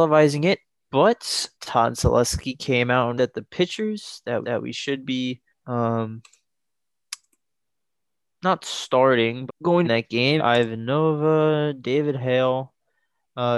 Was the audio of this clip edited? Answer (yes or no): yes